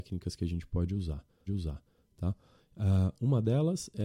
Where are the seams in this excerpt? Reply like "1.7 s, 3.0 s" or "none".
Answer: 1.5 s